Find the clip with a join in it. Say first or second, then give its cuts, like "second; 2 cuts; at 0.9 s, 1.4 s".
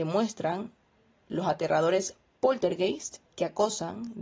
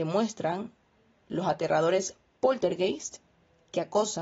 first; 1 cut; at 3.3 s